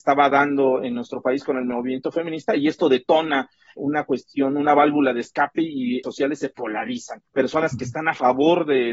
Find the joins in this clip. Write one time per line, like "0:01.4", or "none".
0:03.8
0:06.0
0:07.3